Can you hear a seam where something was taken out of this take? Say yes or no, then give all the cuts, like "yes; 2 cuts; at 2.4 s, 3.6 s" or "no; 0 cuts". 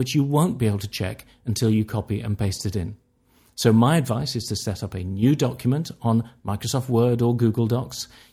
no; 0 cuts